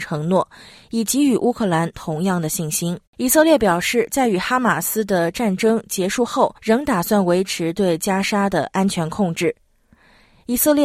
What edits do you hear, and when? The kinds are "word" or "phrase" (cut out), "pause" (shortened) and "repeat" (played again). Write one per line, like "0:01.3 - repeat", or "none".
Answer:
0:03.1 - pause
0:06.6 - pause